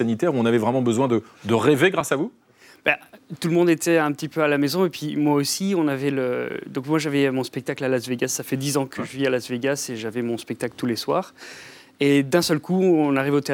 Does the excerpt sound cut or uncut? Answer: uncut